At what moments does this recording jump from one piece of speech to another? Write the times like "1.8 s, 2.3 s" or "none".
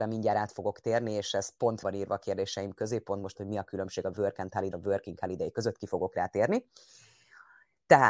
1.8 s, 3.4 s, 4.7 s